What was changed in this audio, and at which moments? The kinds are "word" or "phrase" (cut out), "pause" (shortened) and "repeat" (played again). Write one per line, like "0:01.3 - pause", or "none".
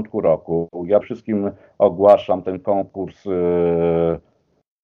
0:01.0 - word